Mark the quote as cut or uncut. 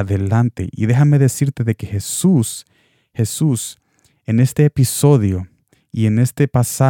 uncut